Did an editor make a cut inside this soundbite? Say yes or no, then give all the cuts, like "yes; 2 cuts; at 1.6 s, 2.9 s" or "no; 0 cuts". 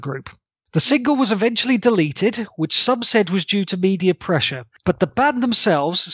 no; 0 cuts